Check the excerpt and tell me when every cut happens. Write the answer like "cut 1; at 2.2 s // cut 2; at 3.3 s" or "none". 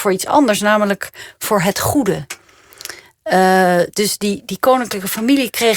none